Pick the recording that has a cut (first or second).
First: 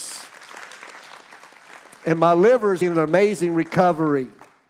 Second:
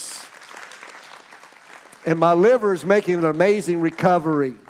first